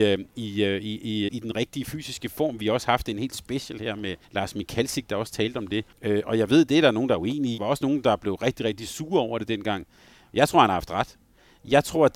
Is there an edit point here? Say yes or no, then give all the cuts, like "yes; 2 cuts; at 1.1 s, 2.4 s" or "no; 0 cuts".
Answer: yes; 4 cuts; at 1.3 s, 4.2 s, 5.9 s, 7.6 s